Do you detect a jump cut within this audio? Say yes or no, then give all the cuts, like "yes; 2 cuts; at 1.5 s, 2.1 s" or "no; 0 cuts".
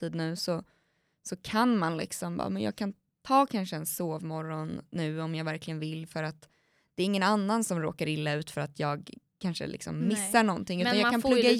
no; 0 cuts